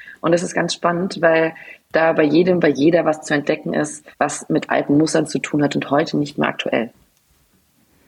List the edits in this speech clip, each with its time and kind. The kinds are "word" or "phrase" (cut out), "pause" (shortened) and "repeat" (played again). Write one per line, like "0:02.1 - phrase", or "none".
0:04.1 - pause